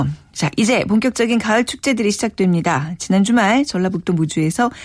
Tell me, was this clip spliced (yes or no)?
no